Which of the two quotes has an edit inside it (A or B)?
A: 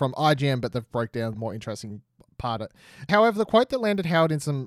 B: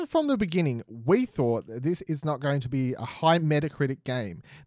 A